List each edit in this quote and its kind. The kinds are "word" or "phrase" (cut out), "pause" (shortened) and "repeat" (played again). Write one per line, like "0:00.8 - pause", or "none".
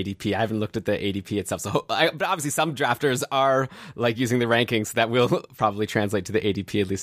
none